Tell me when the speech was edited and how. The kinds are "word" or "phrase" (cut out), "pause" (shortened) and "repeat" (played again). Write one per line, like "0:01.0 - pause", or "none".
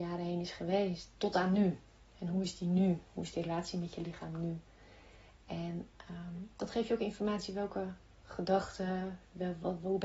none